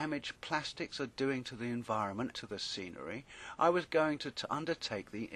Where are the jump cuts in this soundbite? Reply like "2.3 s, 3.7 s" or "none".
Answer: 2.3 s